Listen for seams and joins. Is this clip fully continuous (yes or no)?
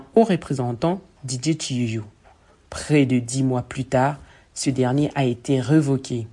yes